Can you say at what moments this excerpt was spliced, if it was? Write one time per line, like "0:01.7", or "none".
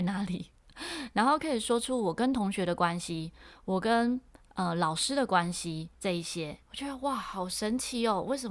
0:05.9
0:06.6